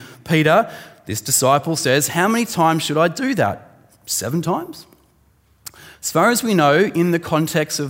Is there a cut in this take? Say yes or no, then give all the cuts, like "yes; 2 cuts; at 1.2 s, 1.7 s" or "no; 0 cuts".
no; 0 cuts